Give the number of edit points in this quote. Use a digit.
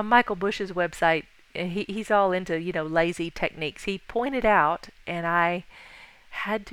0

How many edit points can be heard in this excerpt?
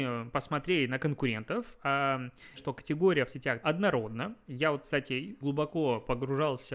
4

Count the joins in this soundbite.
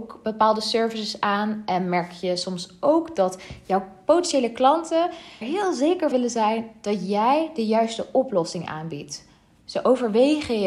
2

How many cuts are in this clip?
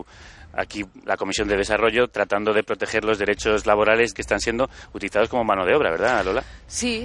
1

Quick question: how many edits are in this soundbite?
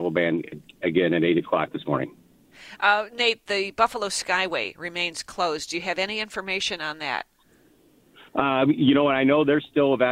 0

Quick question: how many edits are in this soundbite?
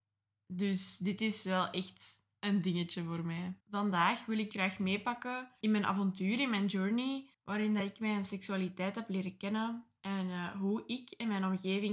4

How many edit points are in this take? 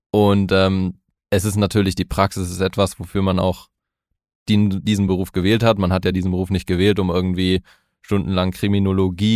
0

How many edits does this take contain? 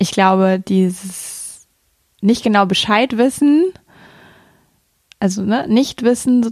0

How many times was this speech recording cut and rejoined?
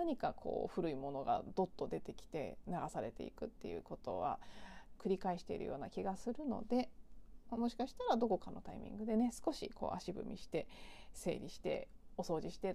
2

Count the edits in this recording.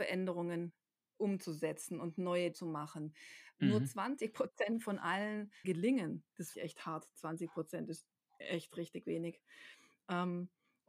3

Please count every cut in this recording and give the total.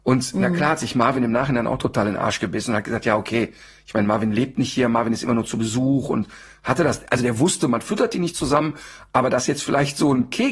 0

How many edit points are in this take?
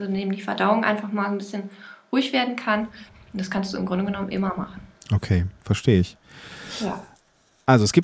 0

